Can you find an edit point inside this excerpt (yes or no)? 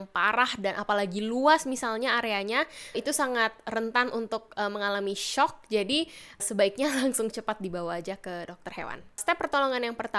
yes